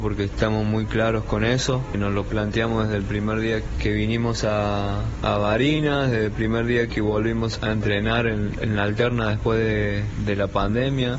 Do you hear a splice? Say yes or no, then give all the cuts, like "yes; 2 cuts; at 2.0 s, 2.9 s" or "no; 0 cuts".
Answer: no; 0 cuts